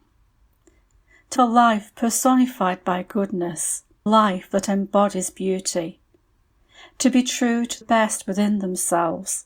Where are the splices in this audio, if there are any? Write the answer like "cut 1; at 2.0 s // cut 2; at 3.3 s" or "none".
cut 1; at 1.4 s // cut 2; at 4.1 s // cut 3; at 7.8 s